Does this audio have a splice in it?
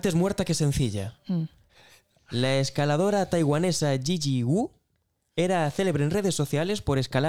no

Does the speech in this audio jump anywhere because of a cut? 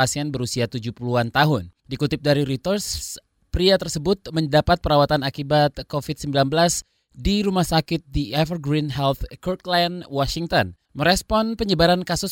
yes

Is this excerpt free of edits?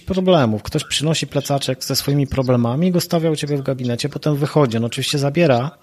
yes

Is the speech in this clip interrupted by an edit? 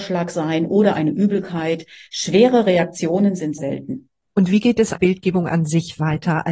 yes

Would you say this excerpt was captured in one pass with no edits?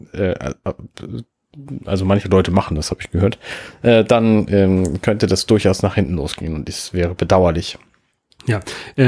yes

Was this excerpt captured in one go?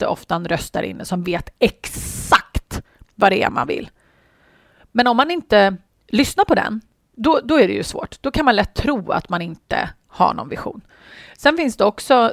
yes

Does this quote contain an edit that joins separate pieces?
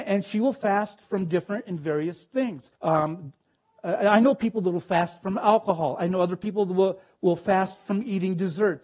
yes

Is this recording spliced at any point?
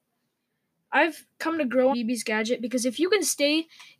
yes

